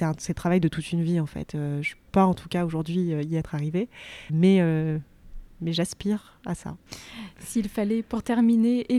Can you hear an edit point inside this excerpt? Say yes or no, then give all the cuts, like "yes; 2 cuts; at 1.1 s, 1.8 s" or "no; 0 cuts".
yes; 2 cuts; at 2.1 s, 4.3 s